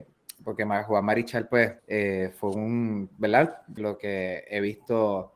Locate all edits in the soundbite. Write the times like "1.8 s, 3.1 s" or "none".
1.8 s, 3.8 s